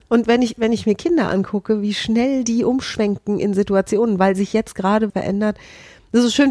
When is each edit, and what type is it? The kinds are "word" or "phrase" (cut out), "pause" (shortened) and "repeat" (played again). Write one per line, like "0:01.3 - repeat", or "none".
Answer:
0:05.1 - word